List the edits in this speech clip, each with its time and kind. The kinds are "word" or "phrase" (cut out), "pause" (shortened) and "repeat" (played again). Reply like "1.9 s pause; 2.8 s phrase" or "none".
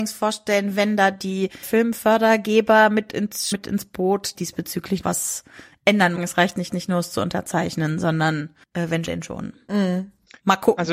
1.6 s word; 3.5 s phrase; 4.3 s phrase; 5.0 s word; 6.2 s phrase; 6.7 s repeat; 8.6 s pause; 9.1 s word